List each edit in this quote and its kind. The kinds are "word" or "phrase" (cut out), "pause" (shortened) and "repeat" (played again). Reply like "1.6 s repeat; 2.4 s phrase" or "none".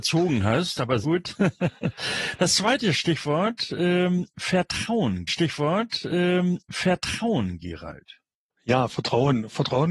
1.0 s word; 5.3 s repeat